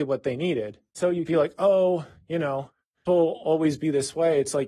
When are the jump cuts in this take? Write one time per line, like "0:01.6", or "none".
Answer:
0:00.9
0:01.3
0:03.1